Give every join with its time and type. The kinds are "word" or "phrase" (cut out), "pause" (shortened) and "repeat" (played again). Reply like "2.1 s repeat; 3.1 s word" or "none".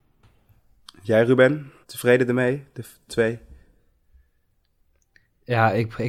1.8 s pause; 3.1 s word